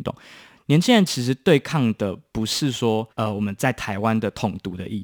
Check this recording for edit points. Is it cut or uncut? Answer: cut